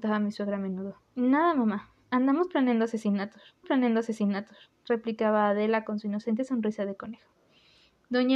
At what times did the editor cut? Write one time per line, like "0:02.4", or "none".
0:01.0
0:03.6